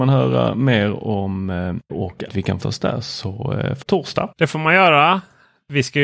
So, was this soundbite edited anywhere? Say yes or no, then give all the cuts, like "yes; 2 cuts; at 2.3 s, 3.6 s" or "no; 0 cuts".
yes; 5 cuts; at 1.9 s, 2.3 s, 2.6 s, 3.8 s, 4.3 s